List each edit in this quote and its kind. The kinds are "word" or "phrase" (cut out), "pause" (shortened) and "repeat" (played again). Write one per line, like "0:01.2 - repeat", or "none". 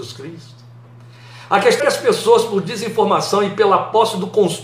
0:01.8 - word